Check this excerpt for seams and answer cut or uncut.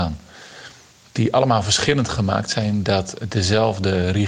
uncut